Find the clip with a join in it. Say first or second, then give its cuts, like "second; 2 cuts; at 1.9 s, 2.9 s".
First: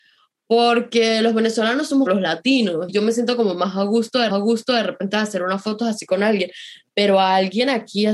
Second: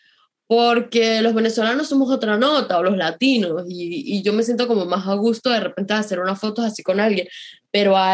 first; 3 cuts; at 2.1 s, 2.9 s, 4.3 s